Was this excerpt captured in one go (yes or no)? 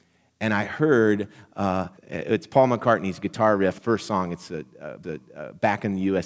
no